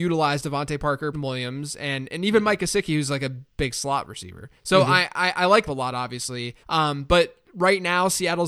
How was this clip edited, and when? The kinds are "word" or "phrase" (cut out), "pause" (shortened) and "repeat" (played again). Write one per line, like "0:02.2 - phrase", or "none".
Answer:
0:01.1 - word
0:04.6 - pause
0:05.7 - phrase
0:06.6 - pause